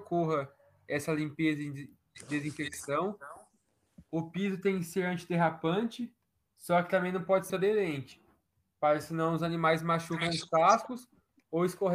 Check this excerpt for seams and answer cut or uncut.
cut